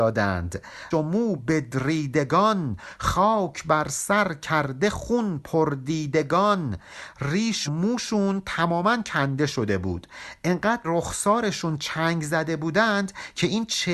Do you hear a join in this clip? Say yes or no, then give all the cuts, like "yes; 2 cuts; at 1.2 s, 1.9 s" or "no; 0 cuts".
yes; 4 cuts; at 0.9 s, 1.4 s, 7.7 s, 10.8 s